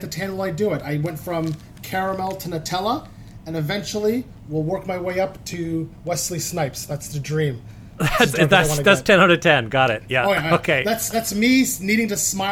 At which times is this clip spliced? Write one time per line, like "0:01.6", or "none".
none